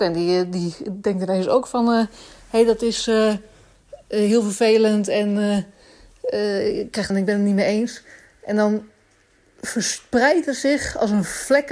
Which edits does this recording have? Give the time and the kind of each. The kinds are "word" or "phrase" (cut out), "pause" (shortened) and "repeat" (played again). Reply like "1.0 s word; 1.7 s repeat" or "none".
7.1 s phrase